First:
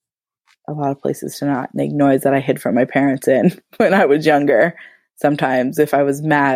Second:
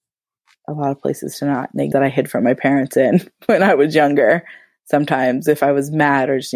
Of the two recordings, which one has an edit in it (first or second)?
second